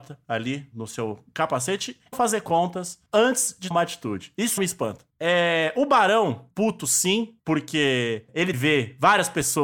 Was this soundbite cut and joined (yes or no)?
yes